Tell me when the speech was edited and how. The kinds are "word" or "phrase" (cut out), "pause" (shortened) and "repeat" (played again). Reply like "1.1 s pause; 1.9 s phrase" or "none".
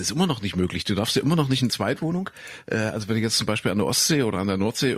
1.7 s word